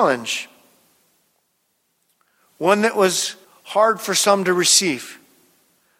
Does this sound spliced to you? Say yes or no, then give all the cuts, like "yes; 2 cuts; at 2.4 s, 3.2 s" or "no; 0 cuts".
yes; 1 cut; at 3.4 s